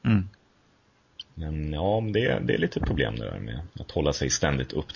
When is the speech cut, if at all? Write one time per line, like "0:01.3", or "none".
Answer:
0:03.7